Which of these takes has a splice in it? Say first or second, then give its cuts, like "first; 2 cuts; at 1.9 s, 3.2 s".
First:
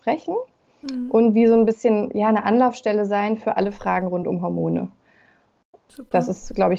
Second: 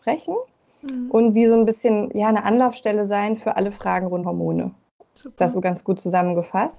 second; 3 cuts; at 4.2 s, 4.8 s, 5.5 s